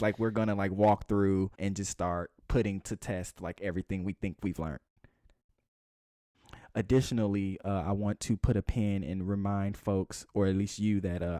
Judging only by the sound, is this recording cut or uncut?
cut